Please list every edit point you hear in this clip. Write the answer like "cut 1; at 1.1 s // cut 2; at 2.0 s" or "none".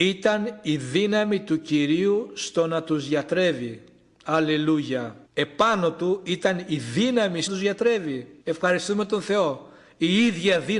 cut 1; at 5.2 s // cut 2; at 7.5 s // cut 3; at 8.4 s